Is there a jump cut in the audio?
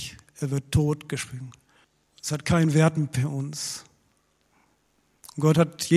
yes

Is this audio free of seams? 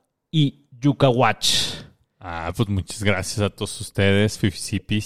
yes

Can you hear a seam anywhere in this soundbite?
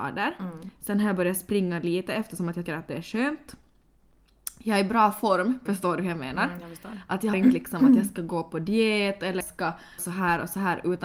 yes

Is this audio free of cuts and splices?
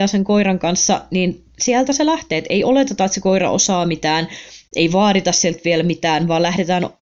yes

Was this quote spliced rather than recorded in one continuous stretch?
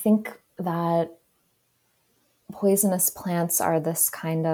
no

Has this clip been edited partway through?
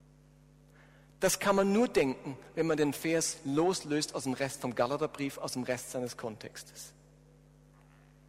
no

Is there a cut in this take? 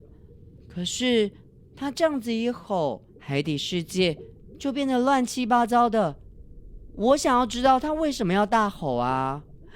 yes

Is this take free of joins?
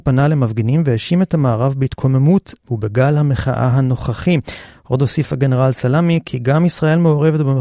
yes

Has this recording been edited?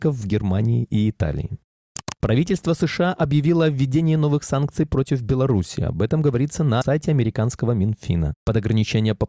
yes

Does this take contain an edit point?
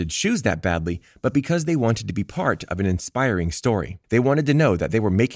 yes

